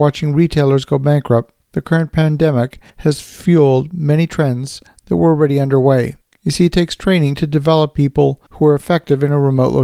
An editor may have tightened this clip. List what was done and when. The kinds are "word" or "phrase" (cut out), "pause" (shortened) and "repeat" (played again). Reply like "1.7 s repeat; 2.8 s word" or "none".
1.6 s pause; 2.9 s pause; 6.2 s pause; 8.5 s pause